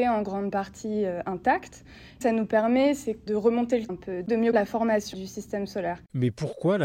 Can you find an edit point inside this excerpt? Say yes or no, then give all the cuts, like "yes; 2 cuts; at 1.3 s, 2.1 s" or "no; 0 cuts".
yes; 5 cuts; at 2.2 s, 3.3 s, 3.9 s, 4.5 s, 5.1 s